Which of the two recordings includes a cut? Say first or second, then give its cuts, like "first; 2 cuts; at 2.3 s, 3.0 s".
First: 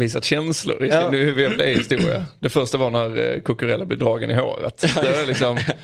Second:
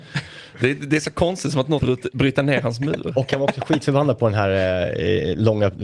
second; 1 cut; at 1.8 s